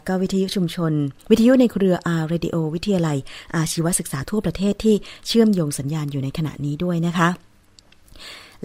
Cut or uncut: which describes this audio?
cut